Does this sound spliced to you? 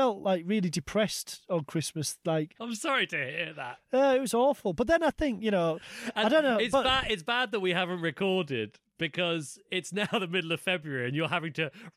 no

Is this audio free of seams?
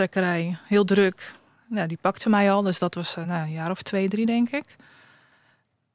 yes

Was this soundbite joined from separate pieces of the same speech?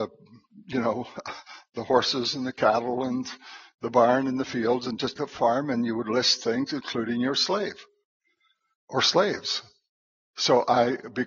yes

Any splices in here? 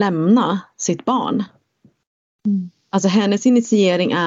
yes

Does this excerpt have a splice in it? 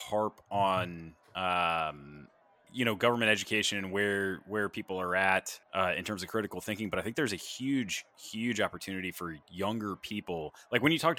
yes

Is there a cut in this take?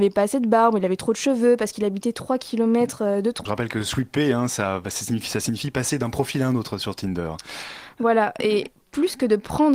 yes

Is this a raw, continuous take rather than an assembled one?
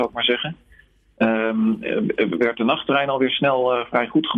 yes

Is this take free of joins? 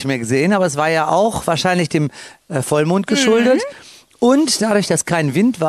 yes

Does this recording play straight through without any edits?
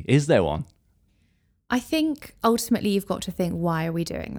yes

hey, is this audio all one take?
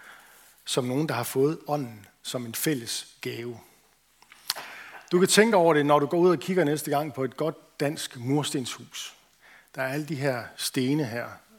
yes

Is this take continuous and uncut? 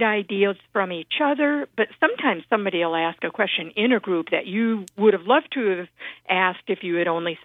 yes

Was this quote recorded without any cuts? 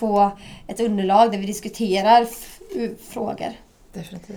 no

